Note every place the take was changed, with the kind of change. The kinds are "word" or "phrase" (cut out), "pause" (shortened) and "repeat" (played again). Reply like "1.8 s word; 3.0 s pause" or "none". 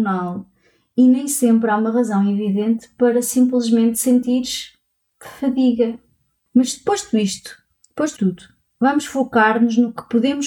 8.2 s word

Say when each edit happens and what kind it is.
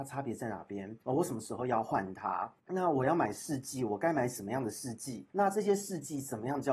1.0 s pause; 2.6 s pause; 5.3 s pause

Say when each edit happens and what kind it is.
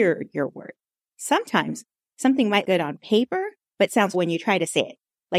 2.6 s word; 3.6 s pause; 4.1 s word

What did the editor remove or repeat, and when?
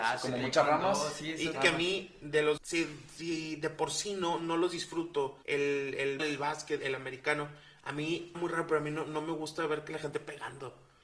1.5 s phrase; 2.6 s word; 5.4 s pause; 6.2 s word; 6.8 s word; 8.3 s word; 10.1 s word

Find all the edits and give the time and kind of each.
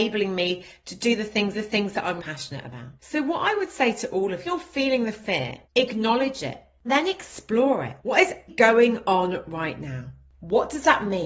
1.5 s repeat; 2.2 s word; 3.0 s pause; 4.5 s phrase; 5.6 s pause; 6.8 s phrase; 8.0 s pause; 8.5 s word

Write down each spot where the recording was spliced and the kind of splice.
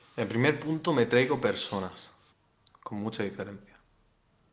2.3 s pause

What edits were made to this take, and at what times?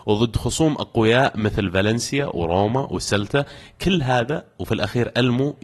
none

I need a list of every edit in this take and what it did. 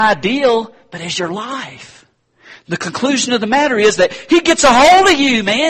none

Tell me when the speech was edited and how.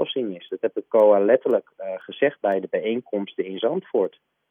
none

